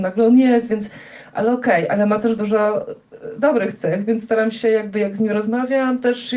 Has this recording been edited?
no; 0 cuts

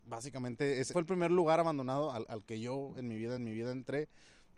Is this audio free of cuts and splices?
no; 2 cuts; at 0.9 s, 3.4 s

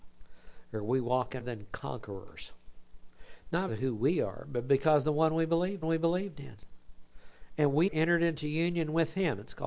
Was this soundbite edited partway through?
yes; 4 cuts; at 1.4 s, 3.7 s, 5.8 s, 7.9 s

